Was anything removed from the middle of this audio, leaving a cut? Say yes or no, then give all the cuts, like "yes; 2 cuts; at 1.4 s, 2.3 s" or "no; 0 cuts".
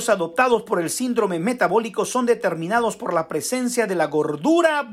no; 0 cuts